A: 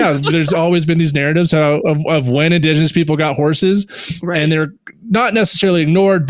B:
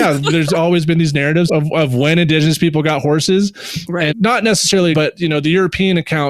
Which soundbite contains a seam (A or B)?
B